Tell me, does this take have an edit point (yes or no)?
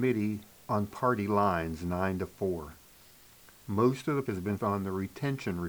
yes